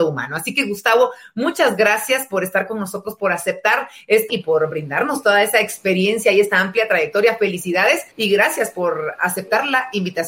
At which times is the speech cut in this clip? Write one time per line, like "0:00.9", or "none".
0:04.3
0:08.1